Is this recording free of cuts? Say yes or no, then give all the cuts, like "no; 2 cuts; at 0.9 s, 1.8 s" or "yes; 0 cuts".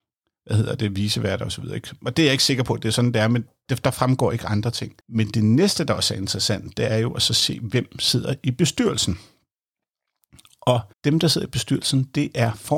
no; 2 cuts; at 5.0 s, 10.9 s